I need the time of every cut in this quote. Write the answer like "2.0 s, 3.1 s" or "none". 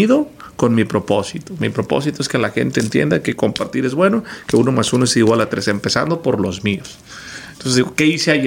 none